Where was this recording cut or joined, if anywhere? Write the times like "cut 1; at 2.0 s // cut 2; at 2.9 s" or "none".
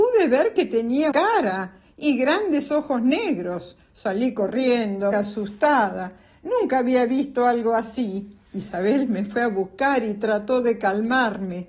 cut 1; at 1.1 s // cut 2; at 5.1 s // cut 3; at 8.5 s